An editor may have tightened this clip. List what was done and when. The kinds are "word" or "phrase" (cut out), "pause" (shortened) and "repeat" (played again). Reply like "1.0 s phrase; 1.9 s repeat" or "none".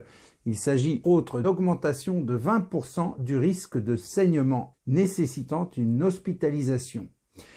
1.0 s word; 1.4 s word; 4.7 s word